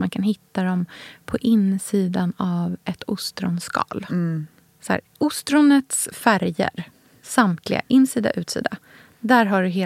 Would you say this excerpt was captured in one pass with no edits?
no; 1 cut; at 5.1 s

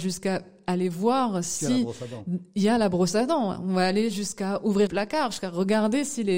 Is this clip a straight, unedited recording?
no; 1 cut; at 4.9 s

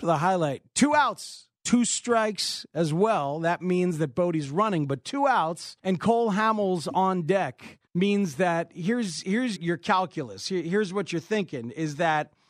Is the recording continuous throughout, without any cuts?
no; 4 cuts; at 1.6 s, 5.8 s, 7.9 s, 9.6 s

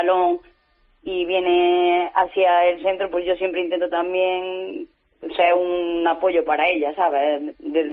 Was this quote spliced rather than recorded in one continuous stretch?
no; 0 cuts

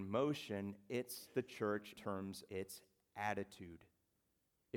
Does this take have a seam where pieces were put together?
yes; 2 cuts; at 1.9 s, 2.5 s

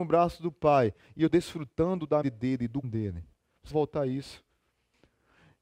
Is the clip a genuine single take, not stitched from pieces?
no; 4 cuts; at 1.3 s, 2.2 s, 2.8 s, 3.7 s

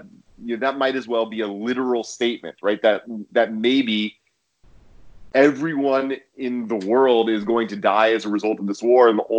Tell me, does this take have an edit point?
no; 0 cuts

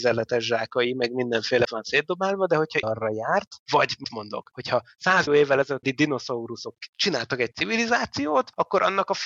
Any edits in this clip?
yes; 6 cuts; at 1.6 s, 2.8 s, 4.0 s, 5.3 s, 5.8 s, 7.5 s

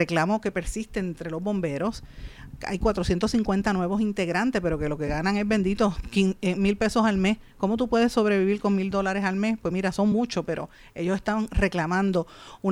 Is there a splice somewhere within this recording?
no; 0 cuts

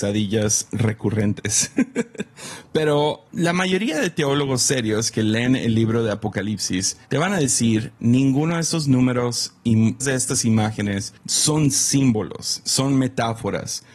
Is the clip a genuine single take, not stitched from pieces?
no; 4 cuts; at 3.3 s, 7.0 s, 10.0 s, 11.2 s

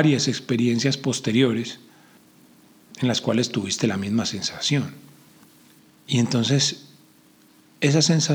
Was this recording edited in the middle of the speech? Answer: no; 0 cuts

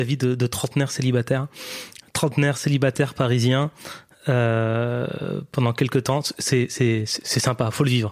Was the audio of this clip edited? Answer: no; 0 cuts

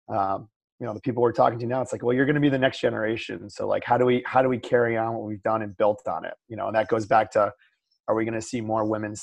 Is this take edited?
no; 0 cuts

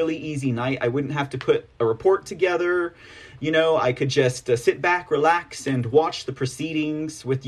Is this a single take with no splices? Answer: yes; 0 cuts

